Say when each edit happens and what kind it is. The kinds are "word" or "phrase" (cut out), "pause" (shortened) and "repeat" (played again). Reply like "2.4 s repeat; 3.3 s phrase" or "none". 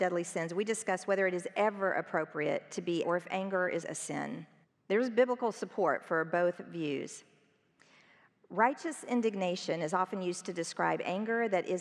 3.0 s word; 3.8 s word; 4.6 s pause

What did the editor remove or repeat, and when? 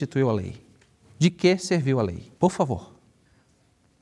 2.4 s pause

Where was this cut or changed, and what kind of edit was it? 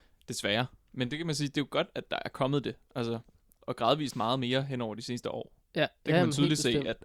none

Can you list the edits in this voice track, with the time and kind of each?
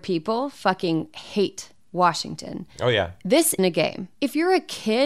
3.6 s word; 4.1 s pause

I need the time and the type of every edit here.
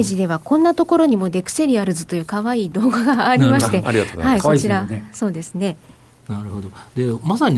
none

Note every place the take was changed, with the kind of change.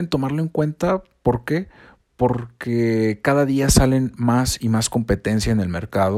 none

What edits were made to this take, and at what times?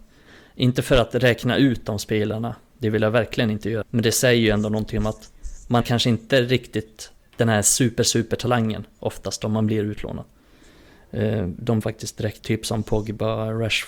3.8 s word; 5.8 s word; 11.8 s phrase; 12.4 s word

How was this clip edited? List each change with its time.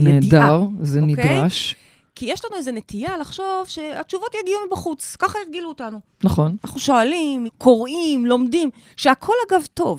7.5 s word

